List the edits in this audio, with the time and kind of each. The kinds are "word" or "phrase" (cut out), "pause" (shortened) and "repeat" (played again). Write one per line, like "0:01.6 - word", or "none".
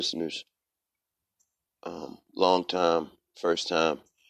none

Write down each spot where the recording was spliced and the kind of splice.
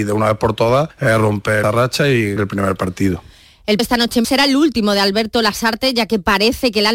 0:01.6 - word
0:02.4 - word
0:03.8 - word
0:04.2 - word

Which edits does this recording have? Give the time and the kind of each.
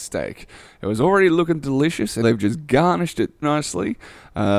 0:02.2 - word
0:03.4 - word

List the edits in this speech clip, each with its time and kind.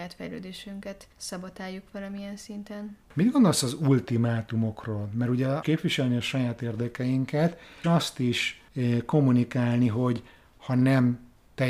0:01.1 - pause
0:03.0 - pause
0:05.6 - phrase
0:07.8 - word
0:08.7 - pause

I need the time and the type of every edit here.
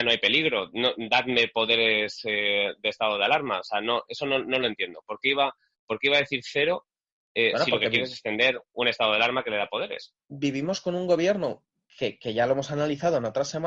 none

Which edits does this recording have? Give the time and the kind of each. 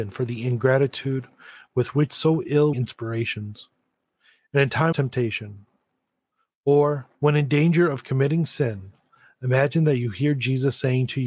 0:02.1 - phrase
0:02.7 - phrase
0:04.9 - word
0:07.1 - pause

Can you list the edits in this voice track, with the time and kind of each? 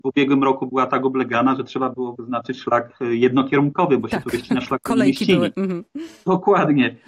none

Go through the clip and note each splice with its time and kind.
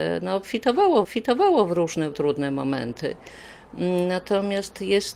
0:01.0 - repeat
0:02.1 - word

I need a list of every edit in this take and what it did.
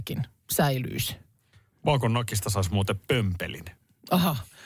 none

